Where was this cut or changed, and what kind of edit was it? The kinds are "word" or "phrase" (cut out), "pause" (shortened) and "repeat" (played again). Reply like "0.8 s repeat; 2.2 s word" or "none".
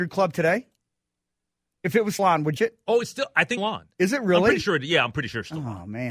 2.2 s word; 2.6 s phrase; 3.6 s phrase